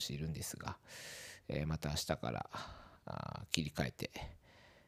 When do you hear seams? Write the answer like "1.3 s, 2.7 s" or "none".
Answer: 3.0 s